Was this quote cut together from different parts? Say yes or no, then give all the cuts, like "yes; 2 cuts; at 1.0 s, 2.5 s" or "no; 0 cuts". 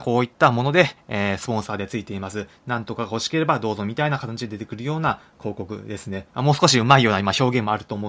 no; 0 cuts